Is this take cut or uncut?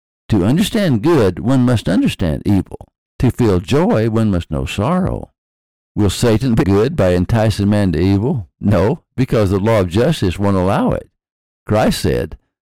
cut